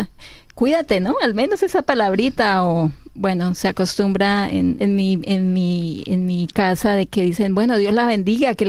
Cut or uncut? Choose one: cut